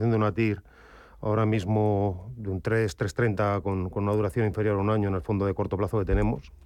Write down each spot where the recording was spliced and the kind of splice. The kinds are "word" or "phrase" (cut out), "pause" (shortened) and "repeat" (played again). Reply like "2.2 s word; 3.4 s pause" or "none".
none